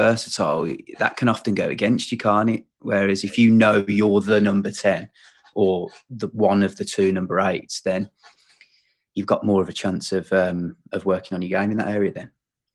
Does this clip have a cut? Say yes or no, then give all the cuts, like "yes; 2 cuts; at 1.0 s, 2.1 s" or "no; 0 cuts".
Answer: no; 0 cuts